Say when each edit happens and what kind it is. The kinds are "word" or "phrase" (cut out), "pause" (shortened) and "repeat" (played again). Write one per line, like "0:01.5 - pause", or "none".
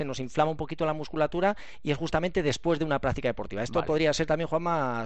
none